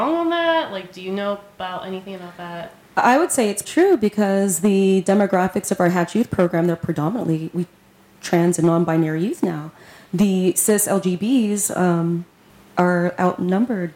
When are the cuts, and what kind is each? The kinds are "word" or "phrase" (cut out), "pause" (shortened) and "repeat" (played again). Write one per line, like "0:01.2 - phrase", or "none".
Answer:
0:03.6 - word